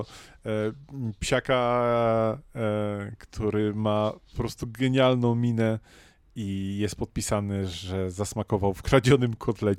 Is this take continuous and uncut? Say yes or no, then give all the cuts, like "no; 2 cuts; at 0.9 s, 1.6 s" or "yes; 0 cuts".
yes; 0 cuts